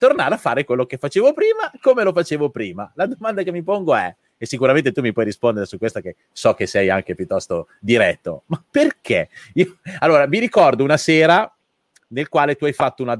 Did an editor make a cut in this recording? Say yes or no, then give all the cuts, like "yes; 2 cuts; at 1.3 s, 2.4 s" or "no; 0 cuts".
no; 0 cuts